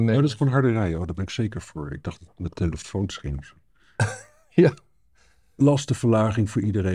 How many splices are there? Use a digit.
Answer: 1